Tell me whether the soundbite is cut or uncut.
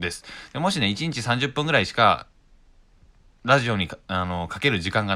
uncut